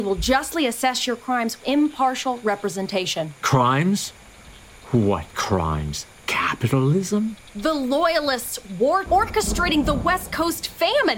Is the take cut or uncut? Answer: cut